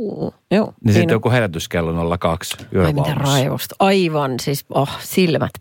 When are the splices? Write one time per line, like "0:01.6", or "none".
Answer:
none